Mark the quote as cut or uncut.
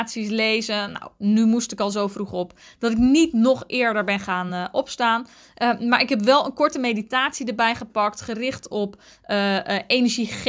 uncut